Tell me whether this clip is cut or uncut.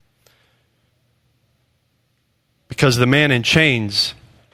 uncut